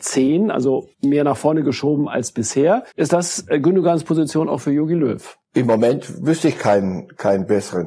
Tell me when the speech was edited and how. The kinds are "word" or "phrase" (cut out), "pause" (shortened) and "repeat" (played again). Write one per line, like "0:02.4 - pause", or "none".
0:00.9 - pause
0:02.9 - pause
0:05.4 - pause